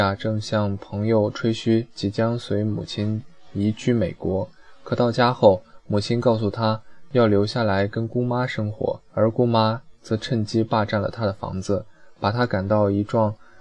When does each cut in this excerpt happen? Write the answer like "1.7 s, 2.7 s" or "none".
9.1 s